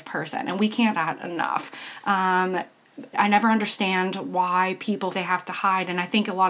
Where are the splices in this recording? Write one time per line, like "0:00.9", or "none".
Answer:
0:00.9
0:03.1
0:05.1